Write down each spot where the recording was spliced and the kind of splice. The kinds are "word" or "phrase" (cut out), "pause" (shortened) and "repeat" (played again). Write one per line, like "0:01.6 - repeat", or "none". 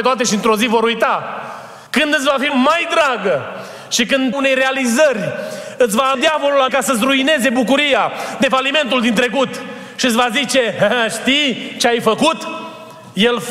0:01.9 - pause
0:02.5 - word
0:04.3 - phrase
0:06.1 - word
0:06.7 - word